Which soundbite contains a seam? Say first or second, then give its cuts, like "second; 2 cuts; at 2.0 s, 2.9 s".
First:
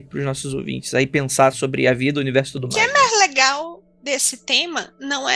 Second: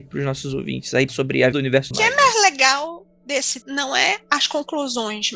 second; 4 cuts; at 1.1 s, 1.5 s, 1.9 s, 3.6 s